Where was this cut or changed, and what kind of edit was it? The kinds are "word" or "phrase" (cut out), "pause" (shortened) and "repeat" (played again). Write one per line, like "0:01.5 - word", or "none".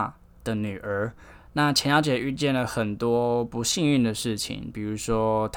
none